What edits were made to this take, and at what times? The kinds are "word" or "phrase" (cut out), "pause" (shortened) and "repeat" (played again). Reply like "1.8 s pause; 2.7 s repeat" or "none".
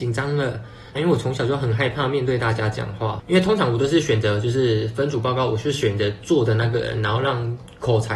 1.0 s phrase